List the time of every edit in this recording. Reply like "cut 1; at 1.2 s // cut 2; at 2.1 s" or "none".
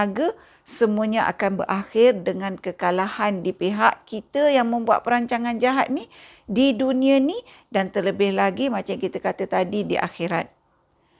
none